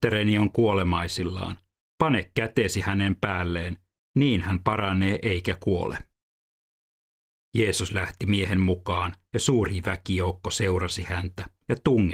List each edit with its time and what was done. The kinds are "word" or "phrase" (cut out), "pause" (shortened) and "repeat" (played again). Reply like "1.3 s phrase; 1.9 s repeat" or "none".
none

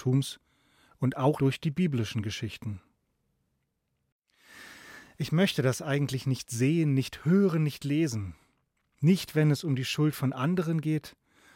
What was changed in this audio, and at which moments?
1.4 s word

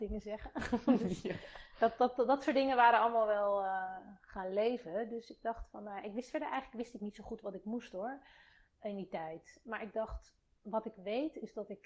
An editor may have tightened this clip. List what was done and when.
none

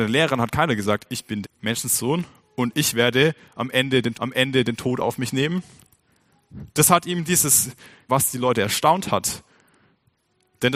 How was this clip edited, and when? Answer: 1.4 s word; 4.1 s repeat; 6.7 s pause; 8.1 s phrase

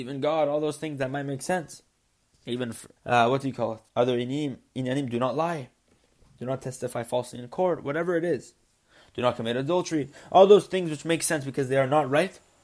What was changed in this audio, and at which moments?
3.0 s pause; 3.9 s pause

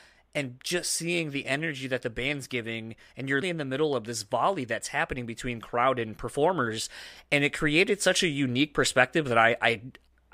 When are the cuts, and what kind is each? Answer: 3.4 s word

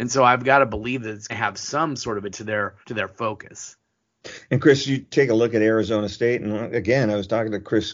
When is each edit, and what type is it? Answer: 1.3 s word; 2.3 s word; 2.8 s pause

